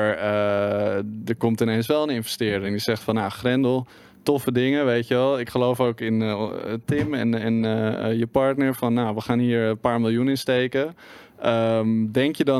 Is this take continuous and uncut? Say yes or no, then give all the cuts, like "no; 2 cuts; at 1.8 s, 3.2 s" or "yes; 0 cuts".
yes; 0 cuts